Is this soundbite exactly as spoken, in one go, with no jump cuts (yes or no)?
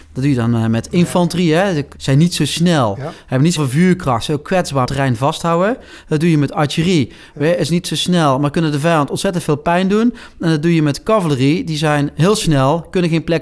no